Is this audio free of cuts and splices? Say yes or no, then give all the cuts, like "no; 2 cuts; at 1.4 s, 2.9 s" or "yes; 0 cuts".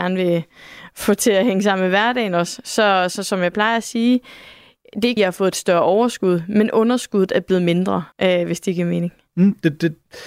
no; 2 cuts; at 5.2 s, 8.1 s